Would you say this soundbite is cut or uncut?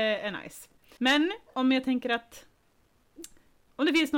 cut